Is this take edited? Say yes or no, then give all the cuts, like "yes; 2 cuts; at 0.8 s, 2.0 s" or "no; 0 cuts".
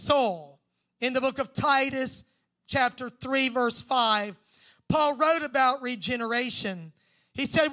no; 0 cuts